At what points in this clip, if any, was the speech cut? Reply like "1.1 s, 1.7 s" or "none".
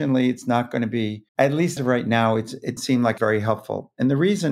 1.3 s, 1.8 s, 2.8 s, 3.2 s